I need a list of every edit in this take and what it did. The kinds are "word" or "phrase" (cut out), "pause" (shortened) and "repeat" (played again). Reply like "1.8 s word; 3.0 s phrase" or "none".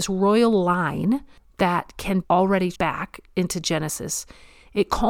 2.2 s word; 2.7 s word